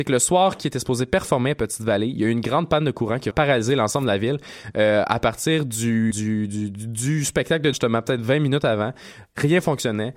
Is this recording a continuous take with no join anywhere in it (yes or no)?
no